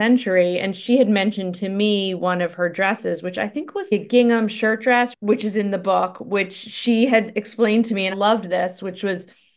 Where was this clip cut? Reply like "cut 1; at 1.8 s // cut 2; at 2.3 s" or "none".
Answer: cut 1; at 8.1 s